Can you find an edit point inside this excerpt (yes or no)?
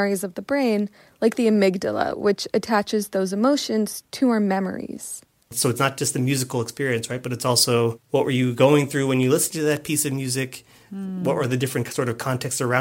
no